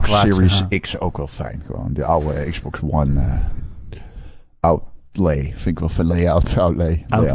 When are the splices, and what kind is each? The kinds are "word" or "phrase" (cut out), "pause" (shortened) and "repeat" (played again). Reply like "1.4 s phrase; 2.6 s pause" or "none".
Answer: none